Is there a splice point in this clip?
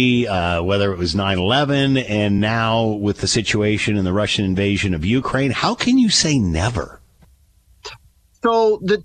no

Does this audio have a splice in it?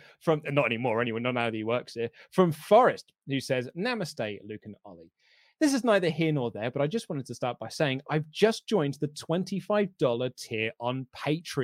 no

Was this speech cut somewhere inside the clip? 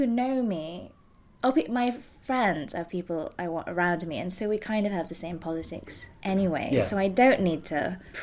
no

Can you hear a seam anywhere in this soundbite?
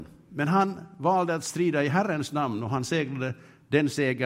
no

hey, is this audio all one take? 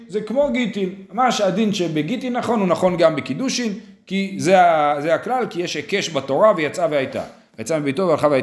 yes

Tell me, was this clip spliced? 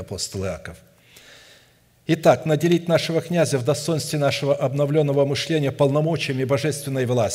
no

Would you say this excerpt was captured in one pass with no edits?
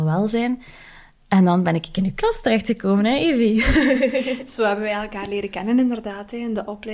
yes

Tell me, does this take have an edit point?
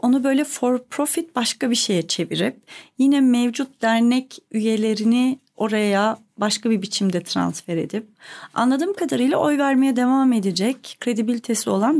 no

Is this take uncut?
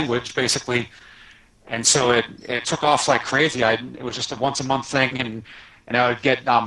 yes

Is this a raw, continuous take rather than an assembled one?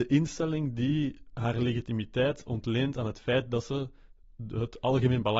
yes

